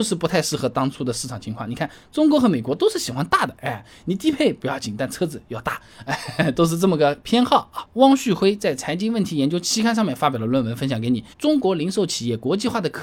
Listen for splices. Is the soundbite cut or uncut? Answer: cut